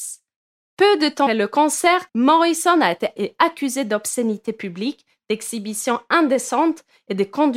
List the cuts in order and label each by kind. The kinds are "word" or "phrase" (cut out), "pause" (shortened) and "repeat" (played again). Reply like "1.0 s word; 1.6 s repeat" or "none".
1.3 s word; 2.1 s pause; 3.2 s word